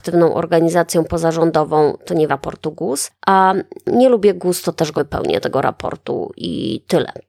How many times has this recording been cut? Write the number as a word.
three